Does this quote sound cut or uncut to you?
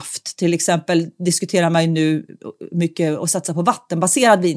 uncut